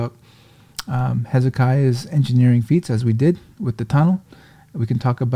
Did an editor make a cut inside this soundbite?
no; 0 cuts

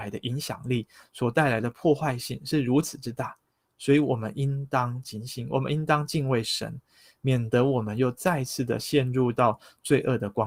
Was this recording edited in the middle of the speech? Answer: no; 0 cuts

